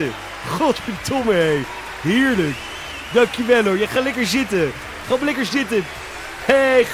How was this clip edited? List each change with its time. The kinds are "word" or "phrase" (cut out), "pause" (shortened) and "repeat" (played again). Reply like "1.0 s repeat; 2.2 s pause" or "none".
none